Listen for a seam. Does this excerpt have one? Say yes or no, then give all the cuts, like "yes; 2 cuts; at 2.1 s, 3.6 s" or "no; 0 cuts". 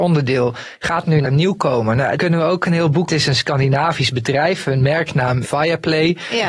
yes; 4 cuts; at 1.2 s, 2.2 s, 3.1 s, 5.4 s